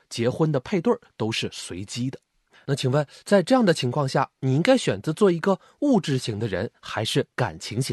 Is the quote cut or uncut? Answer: uncut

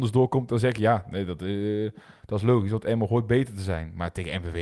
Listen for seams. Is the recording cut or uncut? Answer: uncut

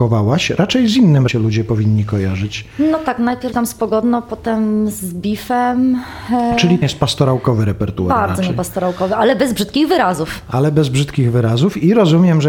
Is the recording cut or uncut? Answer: cut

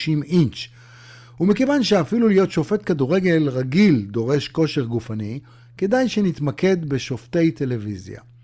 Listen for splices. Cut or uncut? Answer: uncut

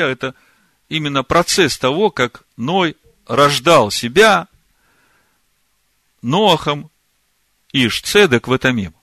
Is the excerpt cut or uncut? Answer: uncut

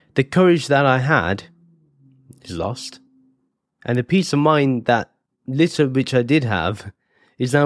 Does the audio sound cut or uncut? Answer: uncut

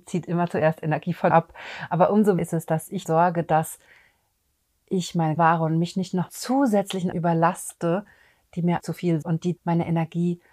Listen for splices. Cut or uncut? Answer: cut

